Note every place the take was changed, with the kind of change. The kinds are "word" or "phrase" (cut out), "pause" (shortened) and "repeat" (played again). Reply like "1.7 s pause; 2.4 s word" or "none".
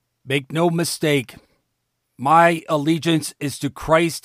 none